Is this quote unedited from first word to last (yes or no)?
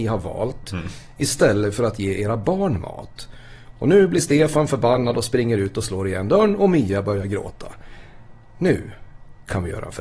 yes